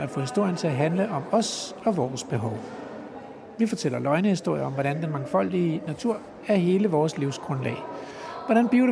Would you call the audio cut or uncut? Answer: uncut